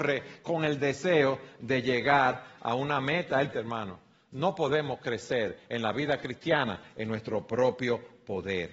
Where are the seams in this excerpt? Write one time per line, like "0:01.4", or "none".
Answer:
0:03.5